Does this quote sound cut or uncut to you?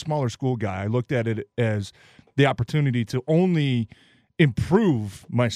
uncut